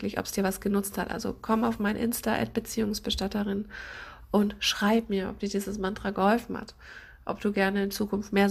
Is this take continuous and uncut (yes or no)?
yes